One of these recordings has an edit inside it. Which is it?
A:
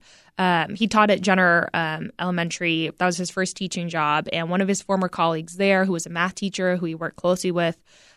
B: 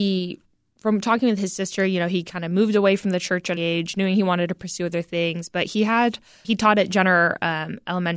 B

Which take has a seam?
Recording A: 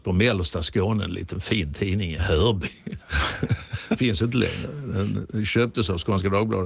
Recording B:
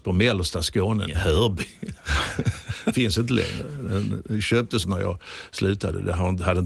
B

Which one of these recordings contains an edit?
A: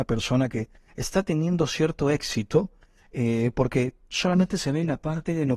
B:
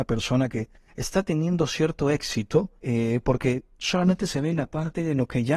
B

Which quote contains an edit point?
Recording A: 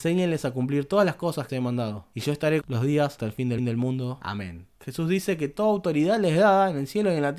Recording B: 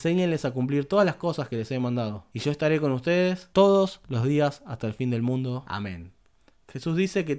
A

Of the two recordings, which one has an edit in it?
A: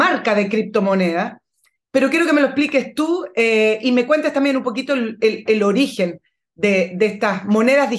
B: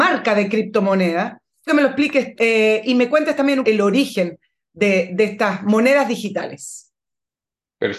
B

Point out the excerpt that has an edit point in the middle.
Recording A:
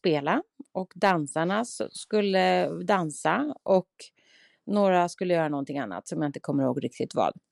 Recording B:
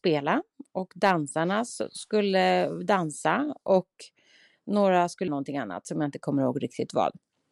B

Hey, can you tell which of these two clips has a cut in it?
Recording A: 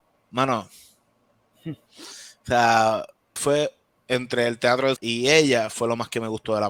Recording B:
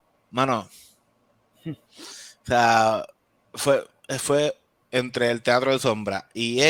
A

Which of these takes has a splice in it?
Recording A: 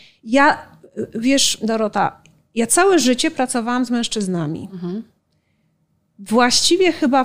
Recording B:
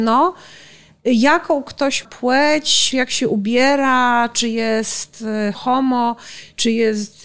B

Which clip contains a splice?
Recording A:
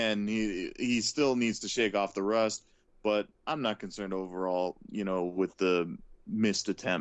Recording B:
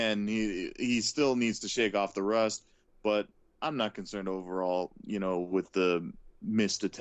A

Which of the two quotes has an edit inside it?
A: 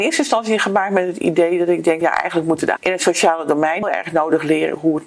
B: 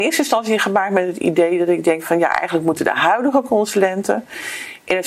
A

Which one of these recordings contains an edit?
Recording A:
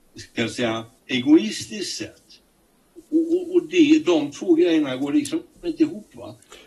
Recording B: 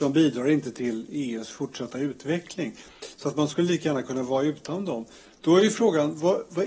A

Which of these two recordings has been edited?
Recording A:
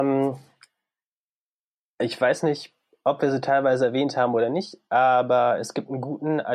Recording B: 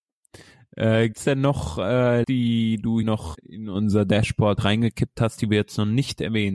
B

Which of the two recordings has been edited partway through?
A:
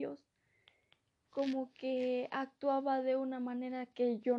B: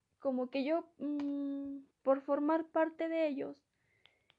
B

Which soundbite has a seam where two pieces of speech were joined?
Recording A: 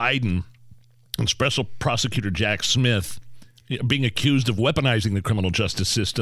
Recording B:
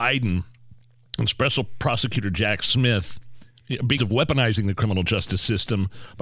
B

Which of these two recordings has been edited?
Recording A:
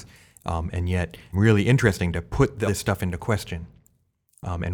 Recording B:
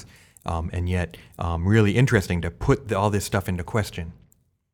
A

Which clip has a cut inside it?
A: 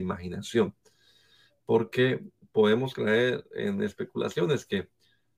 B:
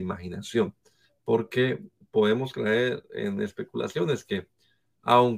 B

